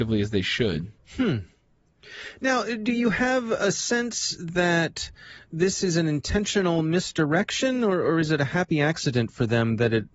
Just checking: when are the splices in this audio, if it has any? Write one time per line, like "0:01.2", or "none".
0:01.0